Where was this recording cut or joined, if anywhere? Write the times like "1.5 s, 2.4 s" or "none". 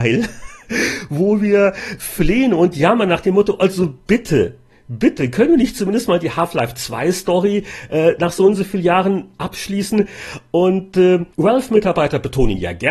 11.3 s